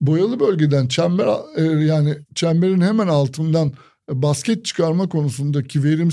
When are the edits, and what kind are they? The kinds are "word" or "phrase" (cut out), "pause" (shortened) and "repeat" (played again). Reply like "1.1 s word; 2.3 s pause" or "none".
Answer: none